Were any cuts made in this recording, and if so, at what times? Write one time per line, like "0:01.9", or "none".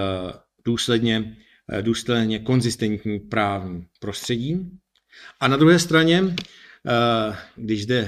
0:04.0